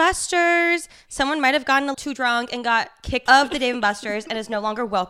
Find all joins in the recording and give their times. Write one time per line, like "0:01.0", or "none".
0:01.9
0:03.3